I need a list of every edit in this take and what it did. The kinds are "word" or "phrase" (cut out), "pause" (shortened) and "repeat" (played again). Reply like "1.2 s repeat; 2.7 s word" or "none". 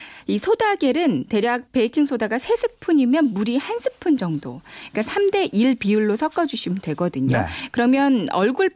1.7 s pause